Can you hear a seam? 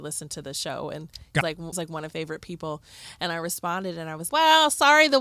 yes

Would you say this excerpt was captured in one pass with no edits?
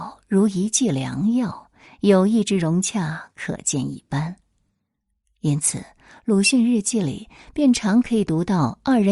yes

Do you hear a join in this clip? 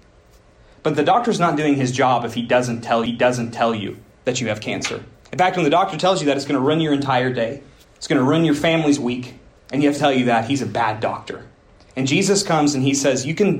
yes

